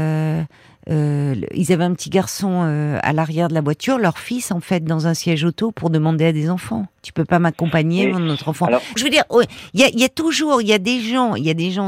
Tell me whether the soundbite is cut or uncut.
cut